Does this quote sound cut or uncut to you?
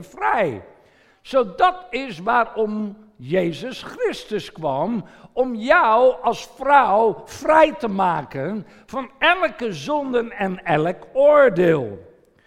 uncut